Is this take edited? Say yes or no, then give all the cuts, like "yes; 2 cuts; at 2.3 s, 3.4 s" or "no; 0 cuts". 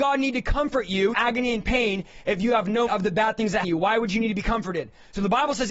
yes; 3 cuts; at 1.1 s, 2.9 s, 3.6 s